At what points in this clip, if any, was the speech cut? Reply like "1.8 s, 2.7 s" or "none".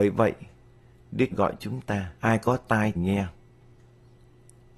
1.3 s, 2.2 s, 3.0 s